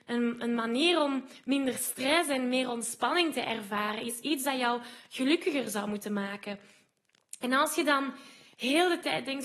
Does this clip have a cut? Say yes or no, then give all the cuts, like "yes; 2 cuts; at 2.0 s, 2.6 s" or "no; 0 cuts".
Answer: no; 0 cuts